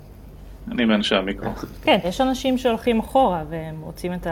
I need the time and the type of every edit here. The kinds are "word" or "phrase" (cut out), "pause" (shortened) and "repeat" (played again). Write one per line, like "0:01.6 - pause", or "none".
0:02.0 - word